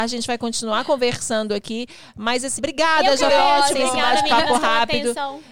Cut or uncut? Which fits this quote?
cut